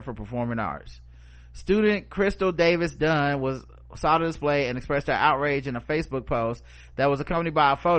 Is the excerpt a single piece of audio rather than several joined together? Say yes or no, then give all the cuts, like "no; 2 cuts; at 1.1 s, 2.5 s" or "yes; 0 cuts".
yes; 0 cuts